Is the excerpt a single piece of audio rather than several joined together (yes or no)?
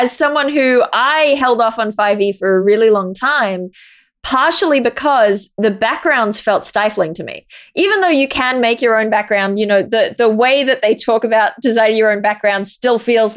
yes